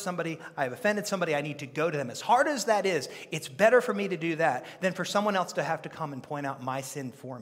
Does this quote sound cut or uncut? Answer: uncut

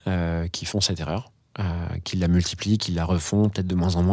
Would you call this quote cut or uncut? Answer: uncut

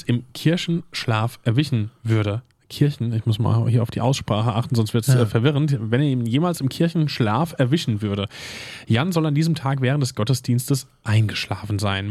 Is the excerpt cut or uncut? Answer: uncut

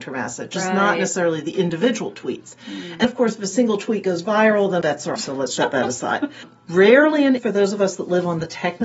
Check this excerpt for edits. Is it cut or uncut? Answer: cut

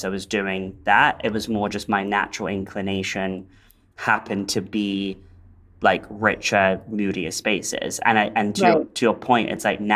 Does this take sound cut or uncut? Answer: uncut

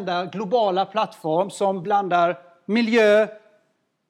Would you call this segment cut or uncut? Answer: uncut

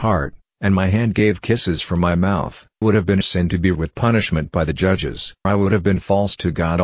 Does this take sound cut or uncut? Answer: cut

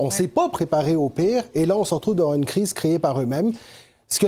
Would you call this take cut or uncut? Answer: uncut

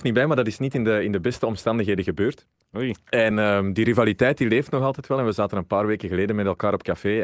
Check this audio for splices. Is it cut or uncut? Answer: uncut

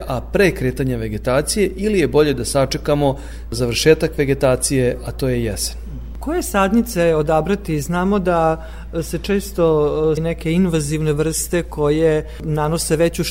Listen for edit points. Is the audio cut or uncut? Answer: cut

